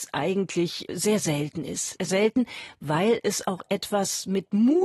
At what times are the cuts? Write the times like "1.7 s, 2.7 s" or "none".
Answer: 2.1 s